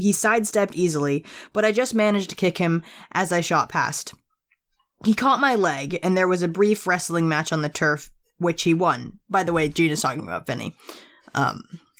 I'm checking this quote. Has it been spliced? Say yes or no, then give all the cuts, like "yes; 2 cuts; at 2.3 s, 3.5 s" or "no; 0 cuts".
no; 0 cuts